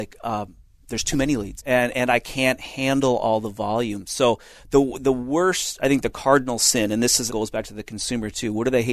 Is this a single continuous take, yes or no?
no